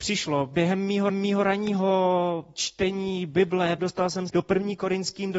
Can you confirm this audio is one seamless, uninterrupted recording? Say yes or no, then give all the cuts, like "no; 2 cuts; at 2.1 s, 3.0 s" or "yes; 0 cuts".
no; 3 cuts; at 1.1 s, 3.8 s, 4.3 s